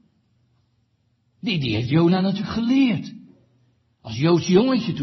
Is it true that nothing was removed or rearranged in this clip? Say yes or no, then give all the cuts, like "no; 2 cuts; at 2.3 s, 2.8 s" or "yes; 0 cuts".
yes; 0 cuts